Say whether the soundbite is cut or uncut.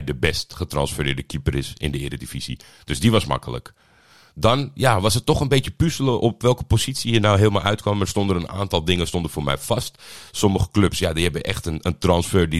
uncut